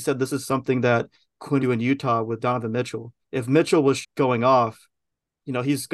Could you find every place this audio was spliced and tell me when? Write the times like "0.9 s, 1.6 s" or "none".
1.6 s, 3.2 s, 4.0 s